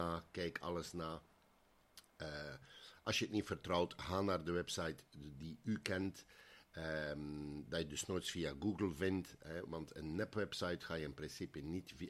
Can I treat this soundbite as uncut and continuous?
yes; 0 cuts

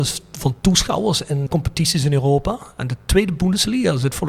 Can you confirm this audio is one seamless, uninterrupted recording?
no; 1 cut; at 1.5 s

